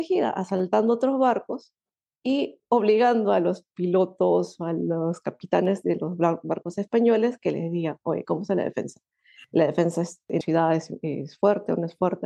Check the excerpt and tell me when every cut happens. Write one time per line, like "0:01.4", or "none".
0:10.4